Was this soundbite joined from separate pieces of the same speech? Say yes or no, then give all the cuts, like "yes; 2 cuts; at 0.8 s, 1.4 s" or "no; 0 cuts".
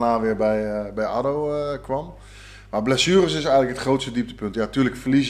no; 0 cuts